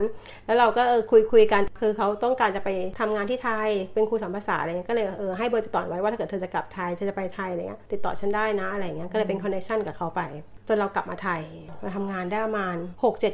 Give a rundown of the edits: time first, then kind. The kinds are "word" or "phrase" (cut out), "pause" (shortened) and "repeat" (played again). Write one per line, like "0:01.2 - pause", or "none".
0:07.9 - pause